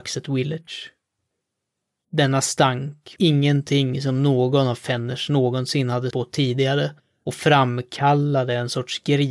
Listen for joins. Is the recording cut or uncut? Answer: cut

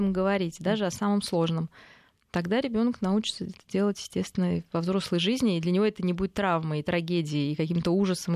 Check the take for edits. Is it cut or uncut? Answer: uncut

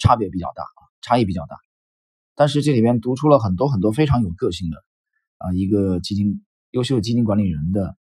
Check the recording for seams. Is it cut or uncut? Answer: uncut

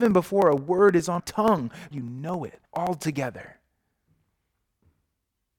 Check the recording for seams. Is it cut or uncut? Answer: cut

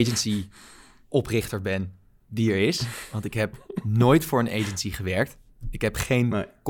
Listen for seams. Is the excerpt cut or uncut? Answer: uncut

